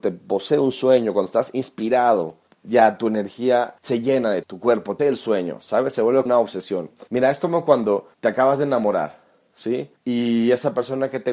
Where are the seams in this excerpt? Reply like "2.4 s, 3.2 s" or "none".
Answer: 2.5 s, 3.8 s, 4.4 s, 5.0 s, 6.3 s, 7.1 s, 8.1 s, 10.0 s